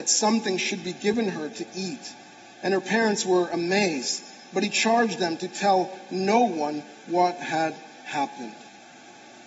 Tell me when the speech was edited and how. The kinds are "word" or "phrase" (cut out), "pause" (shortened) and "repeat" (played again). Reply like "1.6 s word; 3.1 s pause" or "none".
none